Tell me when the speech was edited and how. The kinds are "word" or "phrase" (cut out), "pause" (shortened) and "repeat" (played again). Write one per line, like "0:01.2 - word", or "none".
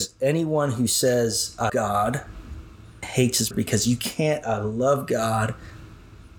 0:01.7 - word
0:03.0 - word
0:03.5 - word
0:04.4 - word